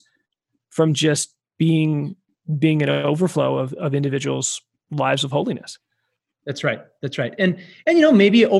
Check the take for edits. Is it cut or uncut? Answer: uncut